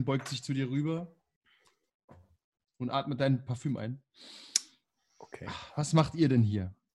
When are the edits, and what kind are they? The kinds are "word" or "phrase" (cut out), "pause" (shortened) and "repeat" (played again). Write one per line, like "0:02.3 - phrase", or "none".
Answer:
none